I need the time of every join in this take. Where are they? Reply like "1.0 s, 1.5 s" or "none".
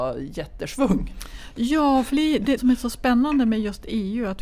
2.1 s, 2.6 s